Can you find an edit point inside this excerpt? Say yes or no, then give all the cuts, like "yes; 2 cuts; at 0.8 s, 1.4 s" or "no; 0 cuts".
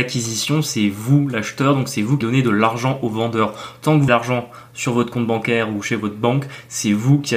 yes; 2 cuts; at 2.2 s, 4.1 s